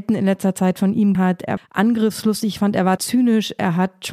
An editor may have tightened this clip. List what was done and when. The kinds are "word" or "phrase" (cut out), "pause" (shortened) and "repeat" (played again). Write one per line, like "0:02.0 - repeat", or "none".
0:01.1 - word
0:01.6 - word
0:03.0 - word